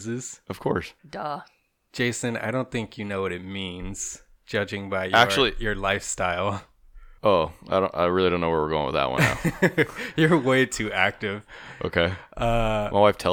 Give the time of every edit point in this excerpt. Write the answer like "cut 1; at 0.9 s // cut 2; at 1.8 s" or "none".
cut 1; at 1.0 s // cut 2; at 7.2 s